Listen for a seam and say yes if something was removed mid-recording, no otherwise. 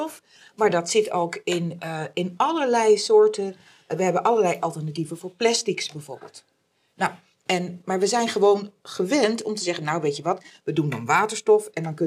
no